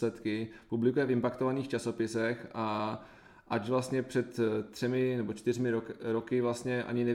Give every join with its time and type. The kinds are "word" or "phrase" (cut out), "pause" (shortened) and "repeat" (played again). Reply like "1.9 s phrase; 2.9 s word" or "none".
none